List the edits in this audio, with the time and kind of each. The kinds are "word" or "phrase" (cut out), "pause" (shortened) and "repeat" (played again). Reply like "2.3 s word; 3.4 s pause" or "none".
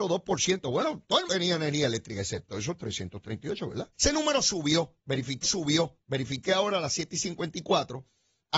1.3 s word; 3.9 s pause; 5.4 s repeat